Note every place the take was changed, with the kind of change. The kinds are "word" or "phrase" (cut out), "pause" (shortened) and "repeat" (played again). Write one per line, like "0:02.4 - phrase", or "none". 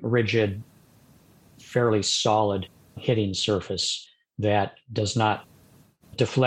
none